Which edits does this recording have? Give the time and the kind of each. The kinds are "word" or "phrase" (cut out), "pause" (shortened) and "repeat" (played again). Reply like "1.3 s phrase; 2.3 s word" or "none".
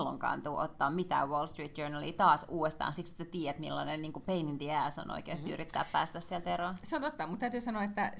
none